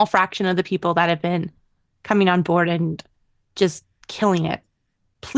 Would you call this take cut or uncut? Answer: uncut